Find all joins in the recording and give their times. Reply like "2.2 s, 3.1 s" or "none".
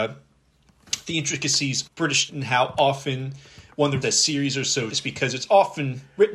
1.9 s, 2.3 s, 4.0 s, 4.9 s